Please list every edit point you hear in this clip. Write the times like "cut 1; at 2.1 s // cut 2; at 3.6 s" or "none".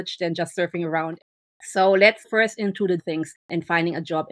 cut 1; at 2.2 s // cut 2; at 3.0 s